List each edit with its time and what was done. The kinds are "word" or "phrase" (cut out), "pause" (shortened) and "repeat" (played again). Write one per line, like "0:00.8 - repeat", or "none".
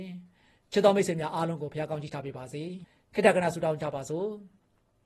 0:02.8 - pause